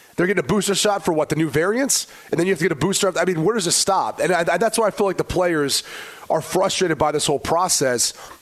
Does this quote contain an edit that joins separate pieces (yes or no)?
no